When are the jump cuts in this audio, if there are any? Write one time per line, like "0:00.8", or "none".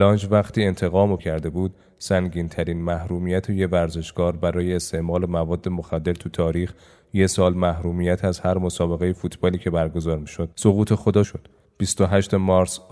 0:01.2
0:10.5
0:11.2